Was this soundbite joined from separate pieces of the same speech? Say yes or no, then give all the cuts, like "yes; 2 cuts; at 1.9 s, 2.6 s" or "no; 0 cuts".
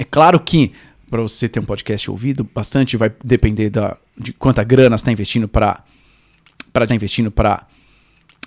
yes; 1 cut; at 6.9 s